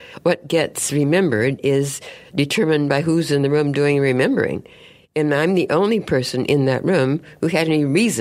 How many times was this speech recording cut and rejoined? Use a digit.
0